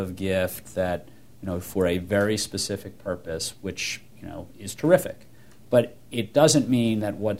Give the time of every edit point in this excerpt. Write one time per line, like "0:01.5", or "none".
none